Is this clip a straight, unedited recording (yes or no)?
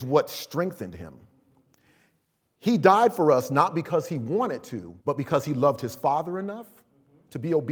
no